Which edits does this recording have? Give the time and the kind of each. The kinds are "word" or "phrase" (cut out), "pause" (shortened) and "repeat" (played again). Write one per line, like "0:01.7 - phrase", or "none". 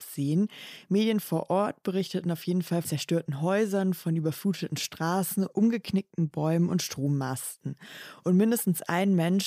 0:02.8 - word